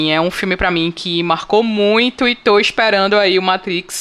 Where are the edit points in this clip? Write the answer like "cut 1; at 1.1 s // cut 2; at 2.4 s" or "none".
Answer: none